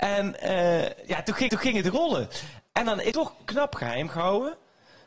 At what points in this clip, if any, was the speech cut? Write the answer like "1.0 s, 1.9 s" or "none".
1.5 s, 3.1 s